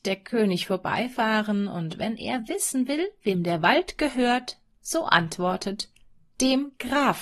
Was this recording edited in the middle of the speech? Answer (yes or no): no